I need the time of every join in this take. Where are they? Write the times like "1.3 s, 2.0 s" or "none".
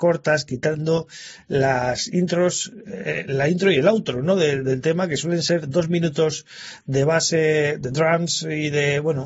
none